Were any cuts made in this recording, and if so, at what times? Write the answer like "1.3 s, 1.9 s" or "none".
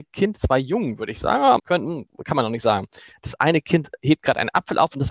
1.6 s